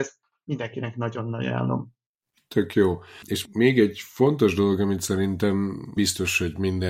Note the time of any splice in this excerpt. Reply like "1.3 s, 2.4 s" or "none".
2.4 s, 3.4 s, 6.0 s